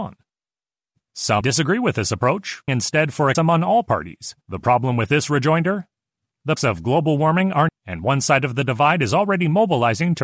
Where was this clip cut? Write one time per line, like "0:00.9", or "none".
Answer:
0:01.4
0:02.7
0:03.3
0:04.4
0:06.6
0:07.7